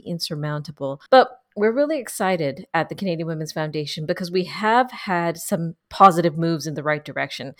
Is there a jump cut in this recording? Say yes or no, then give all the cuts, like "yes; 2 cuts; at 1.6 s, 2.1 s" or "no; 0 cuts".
yes; 1 cut; at 1.1 s